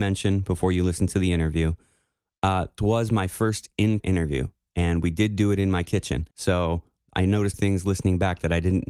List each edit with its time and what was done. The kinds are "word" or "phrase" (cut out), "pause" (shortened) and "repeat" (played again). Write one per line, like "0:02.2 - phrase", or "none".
0:02.8 - word
0:04.0 - word
0:06.3 - pause
0:07.5 - phrase